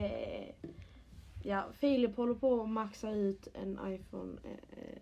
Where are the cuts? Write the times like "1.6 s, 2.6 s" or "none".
none